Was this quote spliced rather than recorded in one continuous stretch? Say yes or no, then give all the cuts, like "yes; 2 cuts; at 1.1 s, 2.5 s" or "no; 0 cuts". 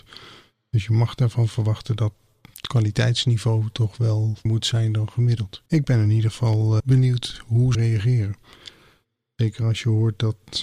yes; 4 cuts; at 4.5 s, 5.7 s, 6.8 s, 7.7 s